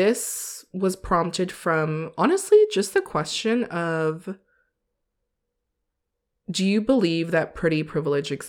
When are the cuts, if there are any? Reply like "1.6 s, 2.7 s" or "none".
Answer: none